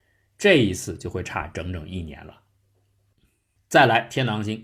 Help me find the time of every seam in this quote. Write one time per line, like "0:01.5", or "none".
none

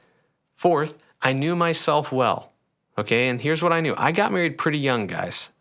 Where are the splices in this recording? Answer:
none

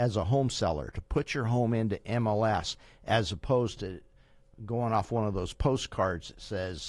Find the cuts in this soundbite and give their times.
none

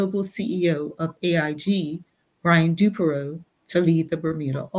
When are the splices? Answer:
none

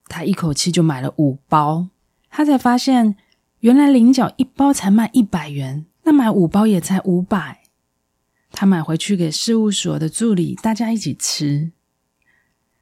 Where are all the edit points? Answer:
0:02.0
0:06.0

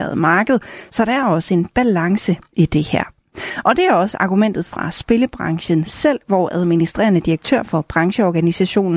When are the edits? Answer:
none

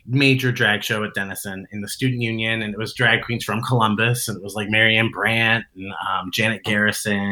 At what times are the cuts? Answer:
none

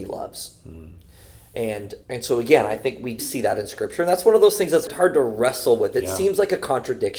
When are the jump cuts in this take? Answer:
0:02.0
0:03.2
0:04.9

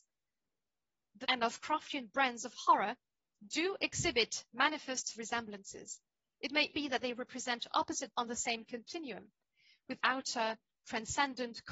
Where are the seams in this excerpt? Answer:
0:01.2
0:05.1
0:06.7
0:08.1
0:10.0

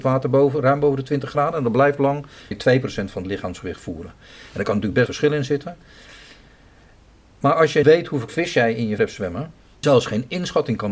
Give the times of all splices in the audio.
0:02.5
0:05.1
0:07.8
0:08.3
0:09.0
0:09.8

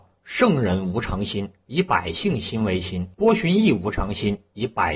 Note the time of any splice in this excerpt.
0:03.1

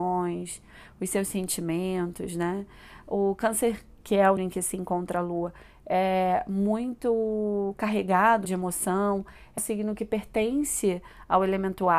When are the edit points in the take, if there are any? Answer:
0:04.4
0:08.4
0:09.6

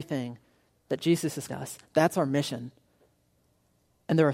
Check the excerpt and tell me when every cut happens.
0:01.5

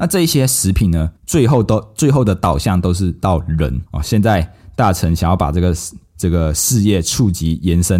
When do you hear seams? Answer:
0:01.2
0:03.9

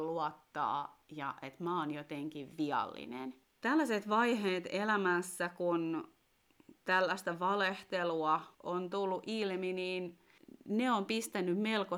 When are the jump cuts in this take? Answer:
0:03.4
0:08.5

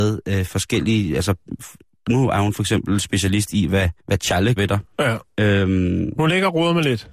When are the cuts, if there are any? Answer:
0:04.0
0:04.6
0:04.9

